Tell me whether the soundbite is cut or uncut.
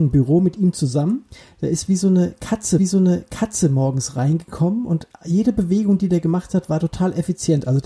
cut